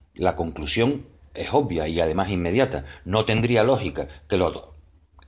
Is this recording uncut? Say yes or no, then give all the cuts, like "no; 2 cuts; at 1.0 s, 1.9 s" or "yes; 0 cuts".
yes; 0 cuts